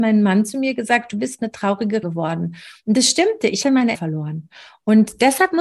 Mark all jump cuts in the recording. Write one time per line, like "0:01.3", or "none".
0:02.0
0:03.6
0:03.9